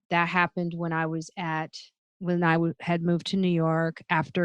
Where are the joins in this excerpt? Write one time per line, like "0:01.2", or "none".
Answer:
none